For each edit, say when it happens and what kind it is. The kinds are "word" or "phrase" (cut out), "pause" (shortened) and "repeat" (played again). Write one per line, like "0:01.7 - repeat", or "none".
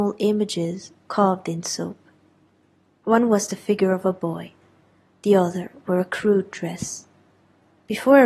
none

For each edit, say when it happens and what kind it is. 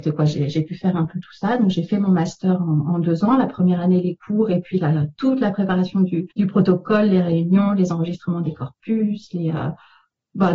0:06.3 - pause

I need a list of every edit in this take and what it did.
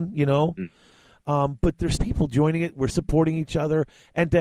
0:02.0 - word
0:02.9 - word

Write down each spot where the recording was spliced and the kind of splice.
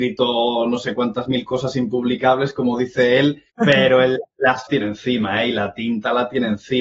0:03.5 - pause
0:04.7 - phrase

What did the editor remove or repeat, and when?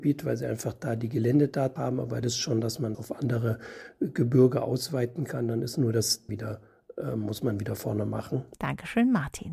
0:01.8 - word
0:02.2 - phrase
0:02.9 - word
0:06.3 - word
0:07.8 - word
0:08.5 - pause

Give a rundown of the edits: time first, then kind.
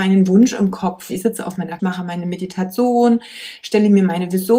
0:01.1 - word
0:01.8 - word

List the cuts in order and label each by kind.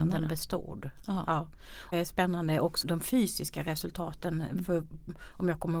0:01.9 - phrase
0:02.8 - word

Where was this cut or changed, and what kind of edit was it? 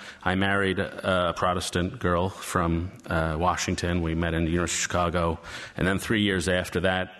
none

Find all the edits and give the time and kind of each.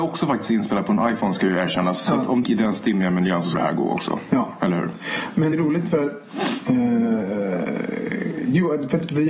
0:02.4 - phrase
0:03.5 - phrase
0:05.5 - word

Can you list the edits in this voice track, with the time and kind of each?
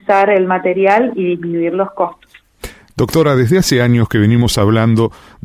none

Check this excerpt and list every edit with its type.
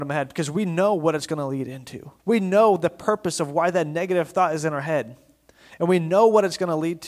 0:02.2 - pause

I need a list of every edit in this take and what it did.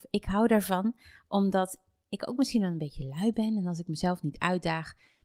none

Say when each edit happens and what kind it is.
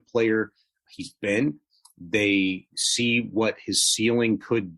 0:02.7 - pause

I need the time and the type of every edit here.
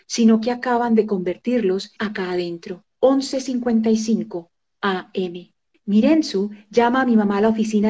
0:02.0 - phrase
0:02.9 - pause
0:05.7 - pause

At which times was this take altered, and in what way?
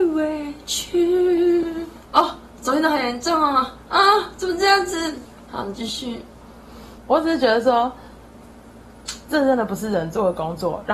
0:07.0 - pause

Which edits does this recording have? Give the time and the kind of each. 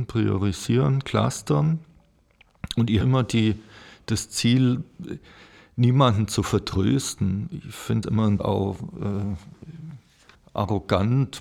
0:03.0 - phrase
0:08.0 - word
0:08.4 - word
0:10.3 - pause

